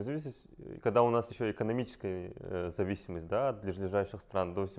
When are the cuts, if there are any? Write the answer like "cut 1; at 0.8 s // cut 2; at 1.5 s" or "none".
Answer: cut 1; at 1.3 s